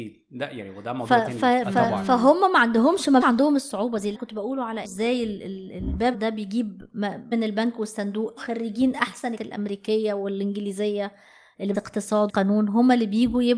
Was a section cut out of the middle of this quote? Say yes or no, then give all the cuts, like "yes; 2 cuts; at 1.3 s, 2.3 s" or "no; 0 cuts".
yes; 9 cuts; at 3.2 s, 4.1 s, 4.8 s, 6.1 s, 7.3 s, 8.4 s, 9.4 s, 11.7 s, 12.3 s